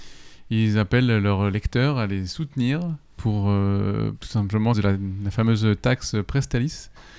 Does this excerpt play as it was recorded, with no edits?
no; 2 cuts; at 4.2 s, 4.7 s

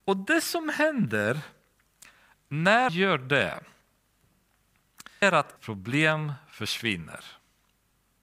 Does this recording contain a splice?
yes; 3 cuts; at 2.9 s, 5.2 s, 5.6 s

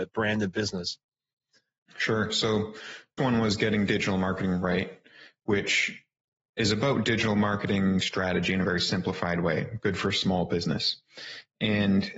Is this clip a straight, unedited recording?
no; 1 cut; at 3.2 s

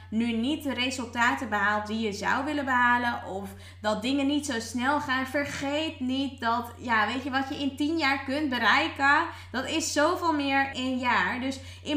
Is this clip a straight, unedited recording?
no; 1 cut; at 10.7 s

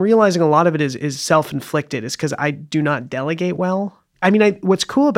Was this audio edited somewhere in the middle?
no; 0 cuts

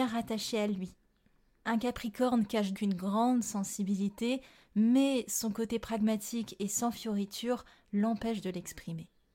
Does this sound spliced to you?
yes; 1 cut; at 2.8 s

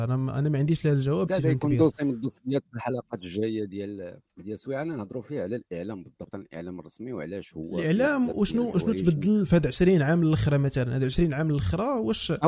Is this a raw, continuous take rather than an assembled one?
no; 3 cuts; at 1.3 s, 4.3 s, 6.3 s

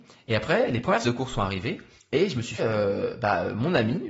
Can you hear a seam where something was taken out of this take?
yes; 3 cuts; at 1.0 s, 2.0 s, 2.6 s

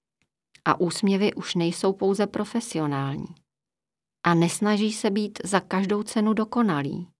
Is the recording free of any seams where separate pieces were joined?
yes; 0 cuts

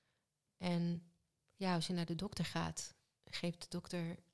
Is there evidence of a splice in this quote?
no; 0 cuts

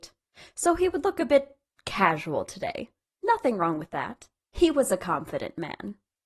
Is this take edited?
no; 0 cuts

